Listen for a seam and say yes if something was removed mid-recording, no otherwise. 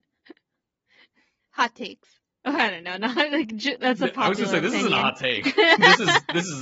no